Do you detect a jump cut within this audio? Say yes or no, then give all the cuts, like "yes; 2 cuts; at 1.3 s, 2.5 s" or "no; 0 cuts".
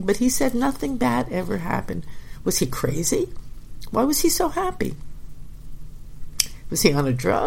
no; 0 cuts